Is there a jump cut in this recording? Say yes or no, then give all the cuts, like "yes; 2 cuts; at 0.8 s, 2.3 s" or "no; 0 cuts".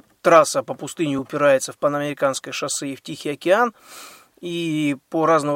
no; 0 cuts